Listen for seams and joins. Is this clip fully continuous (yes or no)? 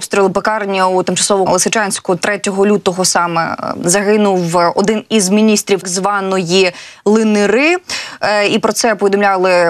no